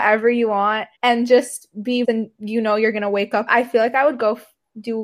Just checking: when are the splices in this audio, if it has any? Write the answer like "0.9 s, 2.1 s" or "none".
1.0 s, 2.0 s, 3.5 s

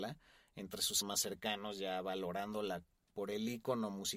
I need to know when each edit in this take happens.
1.0 s

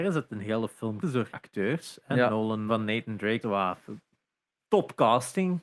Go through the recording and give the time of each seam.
1.0 s, 1.3 s, 2.7 s, 3.4 s

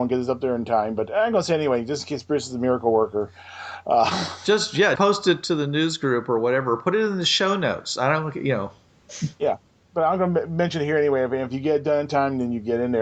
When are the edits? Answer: 5.0 s

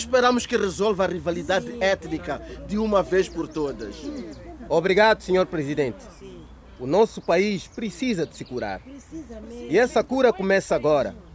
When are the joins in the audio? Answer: none

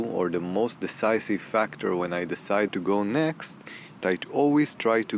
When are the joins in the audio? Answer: 2.7 s, 4.0 s

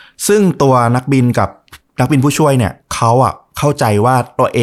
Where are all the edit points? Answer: 2.8 s

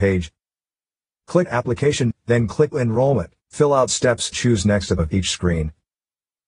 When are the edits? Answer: 1.5 s, 2.1 s, 2.7 s, 3.4 s, 4.3 s, 5.0 s

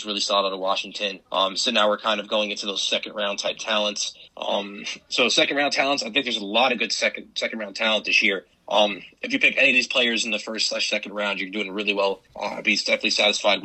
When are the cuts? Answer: 1.3 s, 4.3 s, 8.5 s, 12.3 s

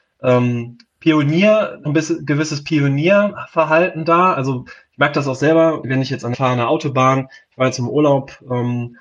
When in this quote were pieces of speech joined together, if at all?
1.9 s, 5.8 s, 6.3 s

